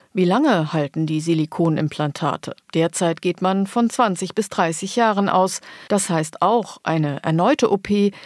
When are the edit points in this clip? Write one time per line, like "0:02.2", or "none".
0:02.6
0:05.9